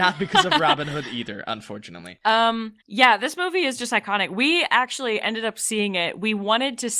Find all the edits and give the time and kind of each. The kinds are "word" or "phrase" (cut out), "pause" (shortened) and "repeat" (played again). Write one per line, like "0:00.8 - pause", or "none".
0:02.8 - pause